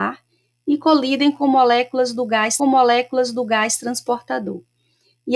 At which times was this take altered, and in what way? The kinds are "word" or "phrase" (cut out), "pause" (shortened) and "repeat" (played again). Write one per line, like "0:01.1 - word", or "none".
0:02.6 - repeat